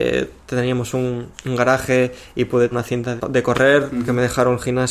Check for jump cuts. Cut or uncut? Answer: cut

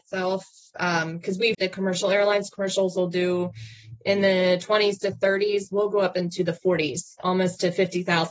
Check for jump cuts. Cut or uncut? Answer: cut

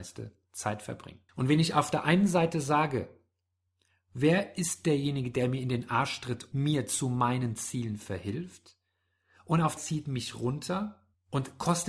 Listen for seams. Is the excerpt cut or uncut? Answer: cut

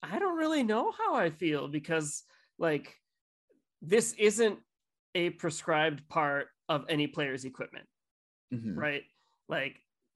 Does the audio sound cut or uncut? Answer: uncut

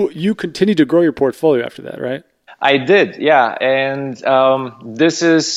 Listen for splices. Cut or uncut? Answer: uncut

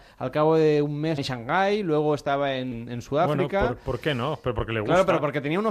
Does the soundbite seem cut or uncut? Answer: cut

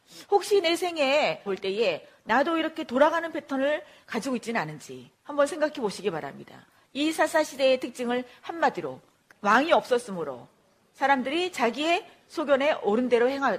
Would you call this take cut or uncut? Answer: cut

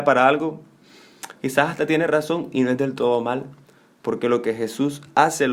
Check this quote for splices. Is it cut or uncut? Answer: uncut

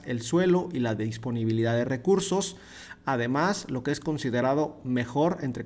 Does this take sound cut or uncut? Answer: uncut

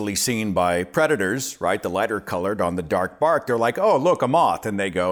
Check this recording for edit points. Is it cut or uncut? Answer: uncut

